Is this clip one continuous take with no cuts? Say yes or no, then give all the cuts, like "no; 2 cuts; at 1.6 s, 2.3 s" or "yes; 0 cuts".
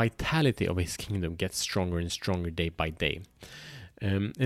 yes; 0 cuts